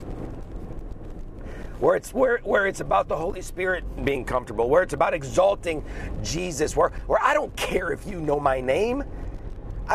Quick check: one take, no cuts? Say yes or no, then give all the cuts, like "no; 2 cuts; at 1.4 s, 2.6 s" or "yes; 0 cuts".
yes; 0 cuts